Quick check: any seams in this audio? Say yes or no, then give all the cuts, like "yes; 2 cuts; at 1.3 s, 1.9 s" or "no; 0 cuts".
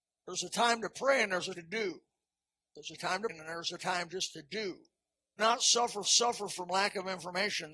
yes; 5 cuts; at 1.5 s, 2.2 s, 3.3 s, 5.4 s, 6.0 s